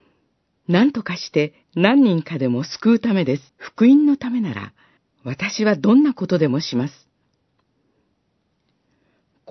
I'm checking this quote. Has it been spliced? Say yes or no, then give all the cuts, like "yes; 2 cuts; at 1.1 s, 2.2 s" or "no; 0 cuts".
yes; 3 cuts; at 1.6 s, 3.5 s, 5.0 s